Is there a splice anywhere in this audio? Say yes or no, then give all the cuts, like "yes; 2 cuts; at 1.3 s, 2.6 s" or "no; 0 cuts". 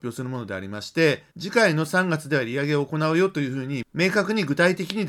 yes; 1 cut; at 1.3 s